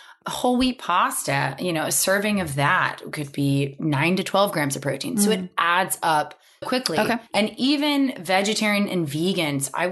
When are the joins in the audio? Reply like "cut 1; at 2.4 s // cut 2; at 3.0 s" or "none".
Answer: cut 1; at 6.6 s // cut 2; at 7.3 s